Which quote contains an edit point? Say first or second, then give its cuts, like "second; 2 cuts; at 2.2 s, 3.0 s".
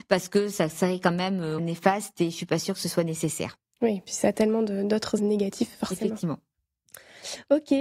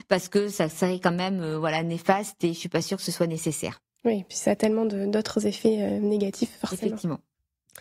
first; 2 cuts; at 1.6 s, 5.2 s